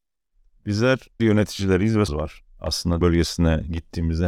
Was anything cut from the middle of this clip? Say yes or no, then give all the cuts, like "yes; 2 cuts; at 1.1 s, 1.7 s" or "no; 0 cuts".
yes; 3 cuts; at 1.2 s, 2.1 s, 3.0 s